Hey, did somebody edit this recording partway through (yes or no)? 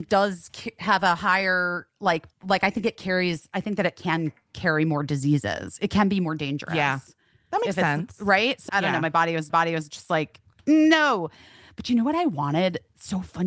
yes